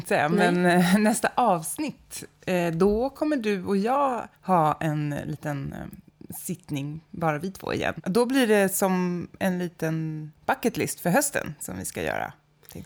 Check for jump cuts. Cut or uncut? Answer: cut